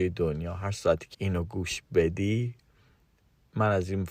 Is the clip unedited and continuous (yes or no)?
no